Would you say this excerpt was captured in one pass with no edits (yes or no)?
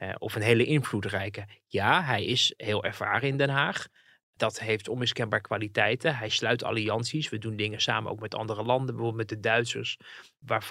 yes